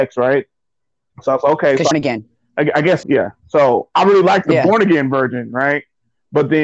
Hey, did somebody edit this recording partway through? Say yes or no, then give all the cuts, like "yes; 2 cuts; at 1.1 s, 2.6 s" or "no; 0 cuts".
yes; 2 cuts; at 1.9 s, 3.0 s